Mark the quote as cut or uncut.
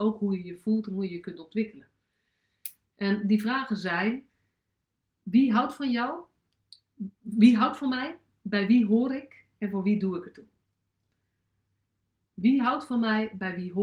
uncut